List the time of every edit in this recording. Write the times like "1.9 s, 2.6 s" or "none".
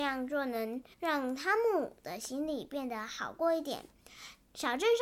0.9 s

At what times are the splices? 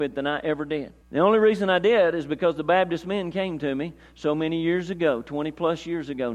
1.0 s

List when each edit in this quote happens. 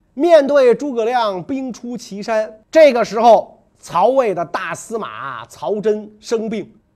2.7 s, 3.7 s

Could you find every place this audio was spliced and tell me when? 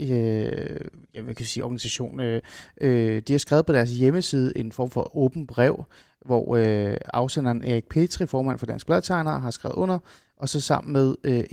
none

